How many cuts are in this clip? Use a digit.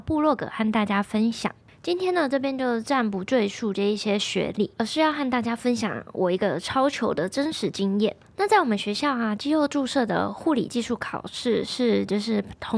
1